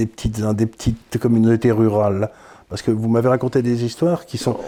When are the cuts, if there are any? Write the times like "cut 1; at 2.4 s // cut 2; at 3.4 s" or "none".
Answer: none